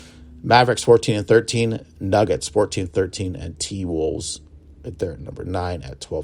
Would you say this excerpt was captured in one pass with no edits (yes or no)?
yes